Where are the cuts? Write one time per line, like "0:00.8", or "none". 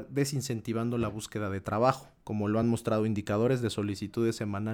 none